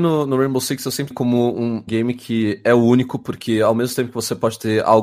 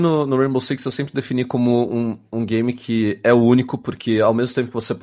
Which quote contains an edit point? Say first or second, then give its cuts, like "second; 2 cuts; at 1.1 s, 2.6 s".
first; 2 cuts; at 1.1 s, 1.9 s